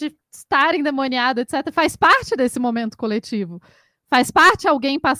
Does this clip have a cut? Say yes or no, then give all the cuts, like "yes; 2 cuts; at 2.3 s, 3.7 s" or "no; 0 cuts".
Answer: no; 0 cuts